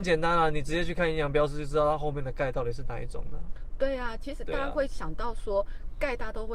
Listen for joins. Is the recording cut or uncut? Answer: uncut